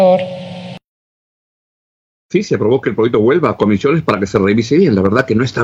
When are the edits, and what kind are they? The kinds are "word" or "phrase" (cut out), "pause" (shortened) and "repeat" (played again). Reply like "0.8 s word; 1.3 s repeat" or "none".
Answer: none